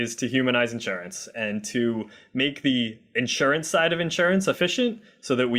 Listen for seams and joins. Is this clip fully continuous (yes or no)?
yes